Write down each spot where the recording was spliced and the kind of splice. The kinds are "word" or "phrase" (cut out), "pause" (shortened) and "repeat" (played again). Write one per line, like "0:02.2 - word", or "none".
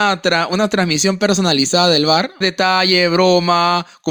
0:02.4 - phrase